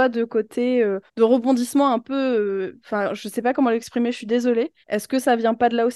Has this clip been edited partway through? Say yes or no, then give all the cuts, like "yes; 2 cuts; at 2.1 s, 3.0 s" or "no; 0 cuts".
yes; 2 cuts; at 1.1 s, 4.8 s